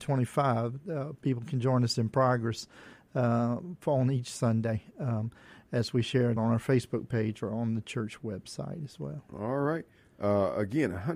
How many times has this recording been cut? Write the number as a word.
one